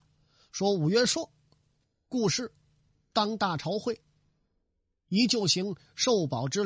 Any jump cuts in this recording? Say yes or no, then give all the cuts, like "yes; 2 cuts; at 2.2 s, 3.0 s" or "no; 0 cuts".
no; 0 cuts